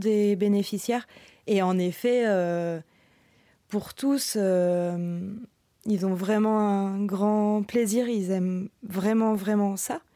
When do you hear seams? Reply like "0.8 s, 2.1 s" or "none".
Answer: none

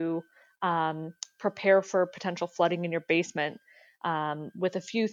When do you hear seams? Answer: none

